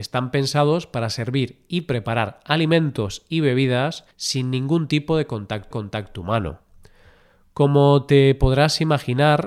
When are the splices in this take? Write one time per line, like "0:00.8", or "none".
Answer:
0:04.1
0:05.7